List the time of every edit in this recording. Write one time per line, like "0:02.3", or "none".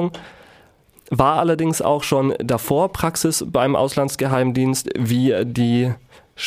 none